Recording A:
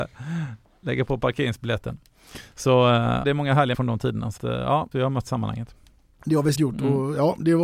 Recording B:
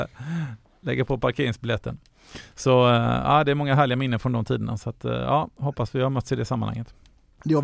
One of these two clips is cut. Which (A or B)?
A